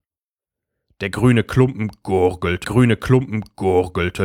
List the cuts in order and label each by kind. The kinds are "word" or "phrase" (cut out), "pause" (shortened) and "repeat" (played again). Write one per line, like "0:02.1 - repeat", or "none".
0:02.6 - repeat